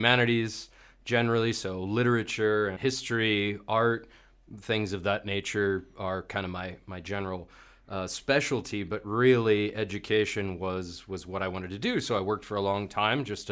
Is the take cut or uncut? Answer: uncut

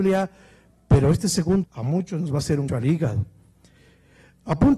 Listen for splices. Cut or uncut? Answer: cut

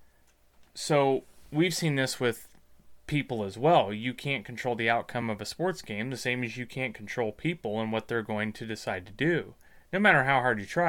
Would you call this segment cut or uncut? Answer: uncut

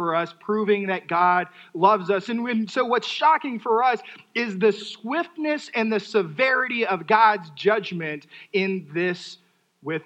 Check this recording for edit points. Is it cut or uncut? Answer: uncut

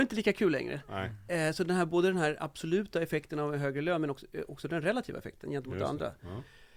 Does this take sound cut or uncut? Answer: uncut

